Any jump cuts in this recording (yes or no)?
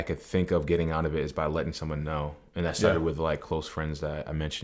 no